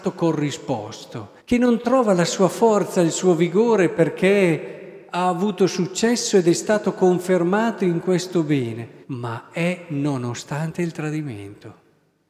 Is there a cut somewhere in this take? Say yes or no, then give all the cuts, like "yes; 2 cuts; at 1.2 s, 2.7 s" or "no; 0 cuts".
yes; 3 cuts; at 1.4 s, 5.1 s, 9.0 s